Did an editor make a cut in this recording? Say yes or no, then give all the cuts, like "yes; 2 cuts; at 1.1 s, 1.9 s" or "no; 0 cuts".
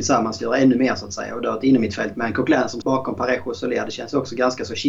yes; 1 cut; at 2.8 s